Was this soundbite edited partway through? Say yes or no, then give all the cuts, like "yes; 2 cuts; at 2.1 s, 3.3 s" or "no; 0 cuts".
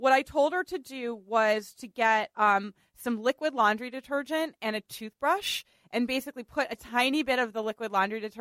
no; 0 cuts